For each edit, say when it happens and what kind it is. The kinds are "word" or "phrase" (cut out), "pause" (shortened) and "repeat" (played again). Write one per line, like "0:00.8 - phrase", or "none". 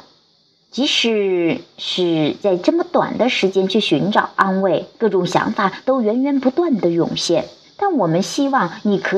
0:04.9 - pause
0:07.6 - pause